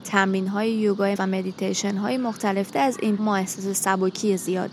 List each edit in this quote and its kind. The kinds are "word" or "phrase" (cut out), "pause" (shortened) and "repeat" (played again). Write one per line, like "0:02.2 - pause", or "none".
0:01.2 - word
0:02.7 - phrase
0:03.2 - word